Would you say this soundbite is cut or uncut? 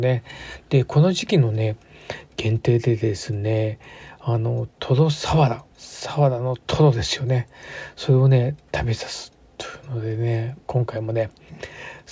cut